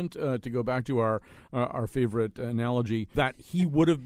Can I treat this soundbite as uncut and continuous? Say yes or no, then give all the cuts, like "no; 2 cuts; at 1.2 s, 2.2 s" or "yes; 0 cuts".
no; 1 cut; at 3.1 s